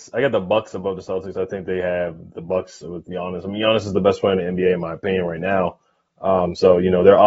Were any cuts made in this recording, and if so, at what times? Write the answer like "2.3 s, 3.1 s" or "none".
none